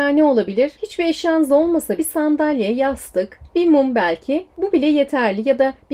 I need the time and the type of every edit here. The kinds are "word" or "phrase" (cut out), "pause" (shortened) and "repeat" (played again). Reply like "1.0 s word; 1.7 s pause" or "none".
2.0 s word; 3.5 s word; 4.5 s pause